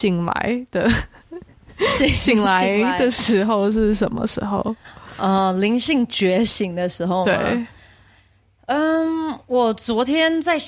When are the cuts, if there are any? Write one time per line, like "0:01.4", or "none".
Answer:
none

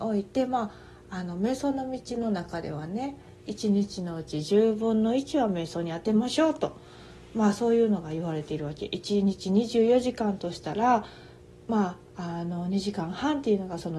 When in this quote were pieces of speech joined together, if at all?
none

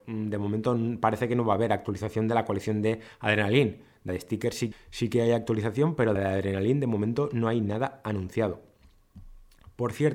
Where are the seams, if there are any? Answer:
0:04.1
0:04.7
0:06.2

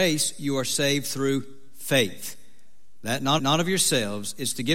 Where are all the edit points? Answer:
0:03.4

